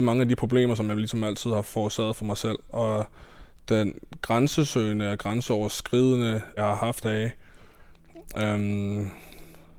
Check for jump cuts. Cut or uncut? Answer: cut